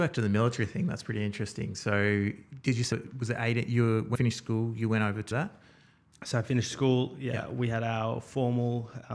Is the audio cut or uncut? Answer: cut